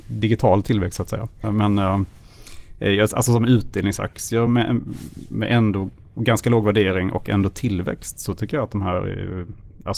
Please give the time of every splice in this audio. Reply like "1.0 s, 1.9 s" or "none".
none